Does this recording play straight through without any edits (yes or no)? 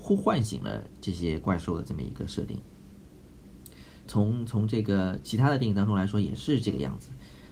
no